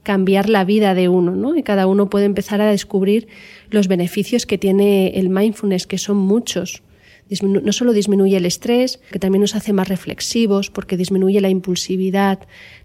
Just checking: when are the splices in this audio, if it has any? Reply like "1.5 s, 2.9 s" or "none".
9.1 s